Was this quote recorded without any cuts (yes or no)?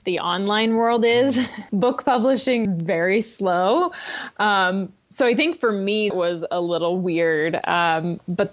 no